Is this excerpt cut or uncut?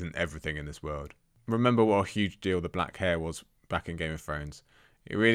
uncut